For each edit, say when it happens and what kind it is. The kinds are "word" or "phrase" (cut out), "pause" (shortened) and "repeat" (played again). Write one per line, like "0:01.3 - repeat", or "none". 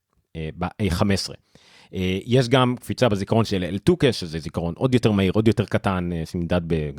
none

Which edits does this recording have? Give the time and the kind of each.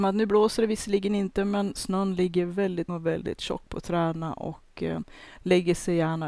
0:02.9 - word

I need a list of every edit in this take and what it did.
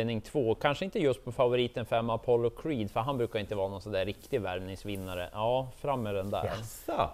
none

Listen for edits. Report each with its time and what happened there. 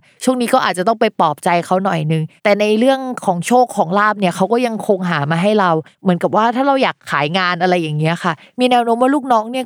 0:02.4 - pause

